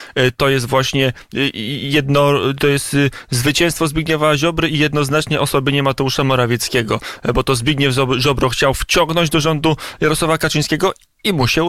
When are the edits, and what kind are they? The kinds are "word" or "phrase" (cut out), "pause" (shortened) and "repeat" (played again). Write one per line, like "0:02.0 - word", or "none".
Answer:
none